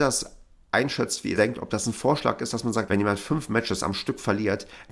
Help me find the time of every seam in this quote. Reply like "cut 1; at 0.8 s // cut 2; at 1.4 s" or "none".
cut 1; at 1.4 s // cut 2; at 2.9 s